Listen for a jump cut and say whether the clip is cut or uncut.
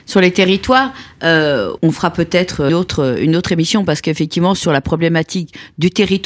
cut